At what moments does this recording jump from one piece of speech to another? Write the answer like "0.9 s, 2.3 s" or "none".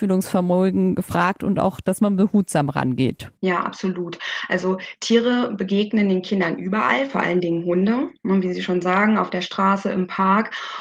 3.4 s